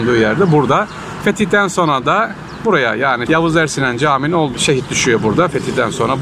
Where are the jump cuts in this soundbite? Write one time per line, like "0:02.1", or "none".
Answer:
0:03.3
0:04.5